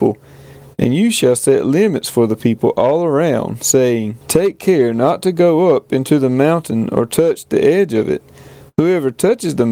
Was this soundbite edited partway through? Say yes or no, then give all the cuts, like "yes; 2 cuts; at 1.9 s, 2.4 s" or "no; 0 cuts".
yes; 1 cut; at 4.2 s